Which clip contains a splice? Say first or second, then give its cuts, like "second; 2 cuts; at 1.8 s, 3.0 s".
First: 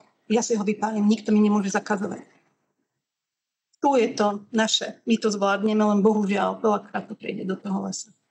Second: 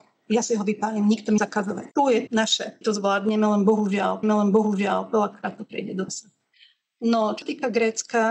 second; 8 cuts; at 1.4 s, 1.9 s, 2.3 s, 2.8 s, 4.2 s, 6.1 s, 6.5 s, 7.4 s